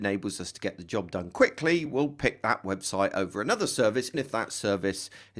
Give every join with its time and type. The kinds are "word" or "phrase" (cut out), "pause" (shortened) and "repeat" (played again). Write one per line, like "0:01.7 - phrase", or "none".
0:01.9 - word
0:04.1 - word